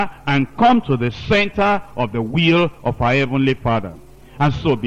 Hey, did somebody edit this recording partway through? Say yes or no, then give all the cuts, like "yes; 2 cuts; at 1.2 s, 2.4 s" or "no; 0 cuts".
no; 0 cuts